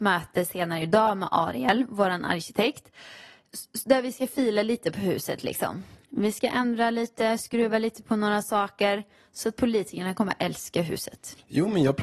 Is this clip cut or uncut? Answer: uncut